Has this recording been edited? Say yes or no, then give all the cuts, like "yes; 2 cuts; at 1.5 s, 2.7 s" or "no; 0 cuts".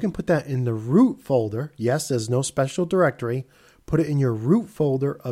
no; 0 cuts